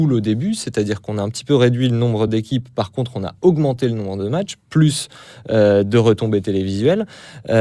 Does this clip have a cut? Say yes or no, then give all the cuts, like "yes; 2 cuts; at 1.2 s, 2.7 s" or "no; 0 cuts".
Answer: no; 0 cuts